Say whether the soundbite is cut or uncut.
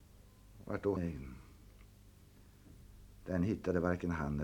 cut